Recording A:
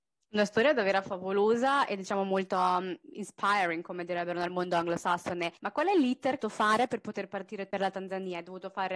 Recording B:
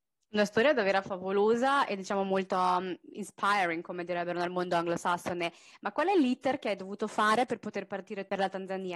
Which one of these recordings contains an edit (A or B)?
A